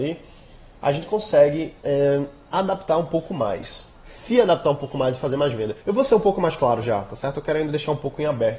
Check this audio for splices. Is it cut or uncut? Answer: cut